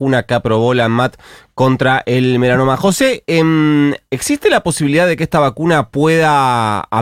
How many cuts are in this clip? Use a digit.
0